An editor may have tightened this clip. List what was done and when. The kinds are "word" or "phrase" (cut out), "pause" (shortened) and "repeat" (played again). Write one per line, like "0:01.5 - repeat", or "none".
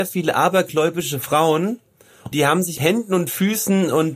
0:02.3 - word
0:02.8 - word